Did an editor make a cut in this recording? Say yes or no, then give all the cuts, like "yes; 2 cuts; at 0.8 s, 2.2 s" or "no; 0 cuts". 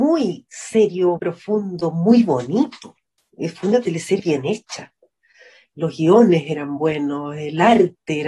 yes; 2 cuts; at 1.2 s, 4.2 s